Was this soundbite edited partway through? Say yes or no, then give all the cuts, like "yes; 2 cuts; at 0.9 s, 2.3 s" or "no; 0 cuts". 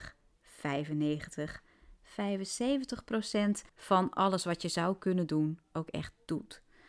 yes; 1 cut; at 3.7 s